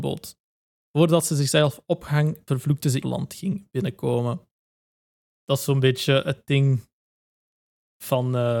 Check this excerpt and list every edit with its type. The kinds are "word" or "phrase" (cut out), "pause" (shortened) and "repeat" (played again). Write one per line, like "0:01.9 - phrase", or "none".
0:02.5 - word
0:03.0 - phrase